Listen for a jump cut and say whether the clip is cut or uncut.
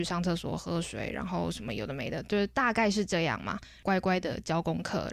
uncut